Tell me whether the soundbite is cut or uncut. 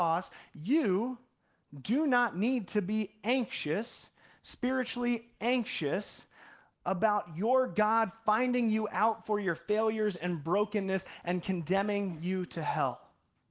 uncut